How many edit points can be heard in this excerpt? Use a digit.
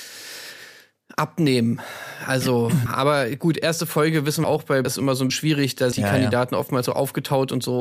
6